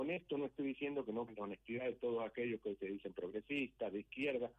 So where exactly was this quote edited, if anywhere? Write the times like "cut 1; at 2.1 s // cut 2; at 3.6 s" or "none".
cut 1; at 1.3 s